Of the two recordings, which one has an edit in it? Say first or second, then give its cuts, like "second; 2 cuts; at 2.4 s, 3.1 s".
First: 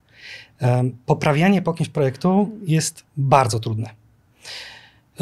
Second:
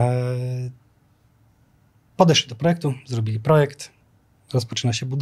first; 1 cut; at 3.1 s